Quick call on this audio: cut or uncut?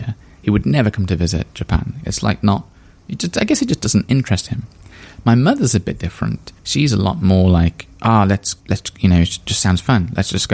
cut